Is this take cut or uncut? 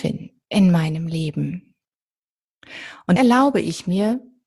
cut